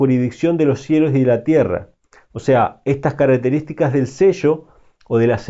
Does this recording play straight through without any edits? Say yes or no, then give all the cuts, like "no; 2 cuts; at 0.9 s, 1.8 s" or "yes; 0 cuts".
yes; 0 cuts